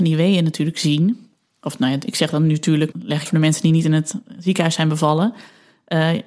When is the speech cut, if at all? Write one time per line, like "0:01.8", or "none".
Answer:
0:01.3
0:02.9
0:03.3